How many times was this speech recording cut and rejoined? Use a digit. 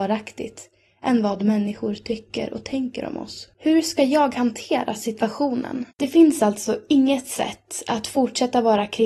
2